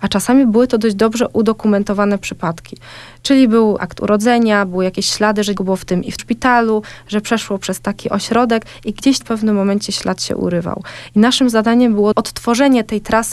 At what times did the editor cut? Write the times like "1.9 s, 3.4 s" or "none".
3.8 s, 5.6 s, 6.2 s, 9.2 s